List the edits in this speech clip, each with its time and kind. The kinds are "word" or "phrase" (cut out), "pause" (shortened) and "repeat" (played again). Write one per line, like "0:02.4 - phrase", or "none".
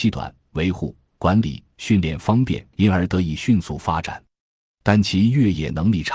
0:02.7 - pause